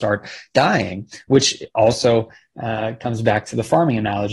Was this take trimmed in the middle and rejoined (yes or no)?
no